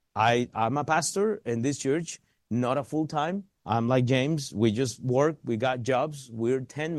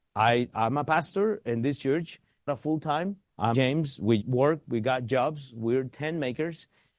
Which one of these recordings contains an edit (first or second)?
second